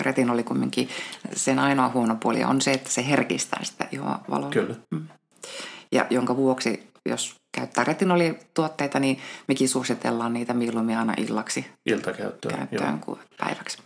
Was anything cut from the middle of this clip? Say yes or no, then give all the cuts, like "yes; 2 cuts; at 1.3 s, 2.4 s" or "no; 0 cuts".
yes; 2 cuts; at 4.8 s, 7.0 s